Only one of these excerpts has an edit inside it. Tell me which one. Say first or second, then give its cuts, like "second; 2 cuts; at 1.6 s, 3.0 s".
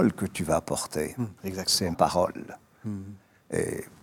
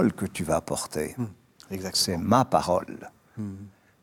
first; 2 cuts; at 1.4 s, 1.9 s